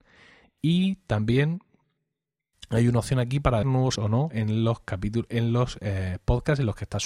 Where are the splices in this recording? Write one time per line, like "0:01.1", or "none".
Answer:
0:03.6
0:04.0
0:04.3